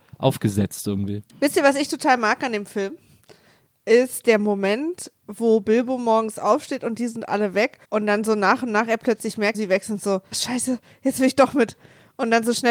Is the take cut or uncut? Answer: cut